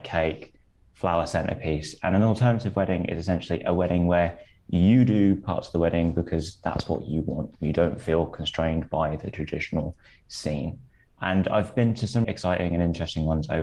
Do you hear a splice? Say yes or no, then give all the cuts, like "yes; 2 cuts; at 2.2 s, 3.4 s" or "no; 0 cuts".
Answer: yes; 1 cut; at 12.2 s